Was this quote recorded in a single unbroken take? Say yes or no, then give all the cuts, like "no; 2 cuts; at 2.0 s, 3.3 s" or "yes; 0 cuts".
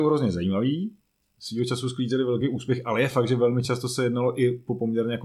yes; 0 cuts